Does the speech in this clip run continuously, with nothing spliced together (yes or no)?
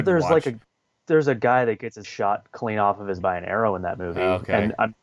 no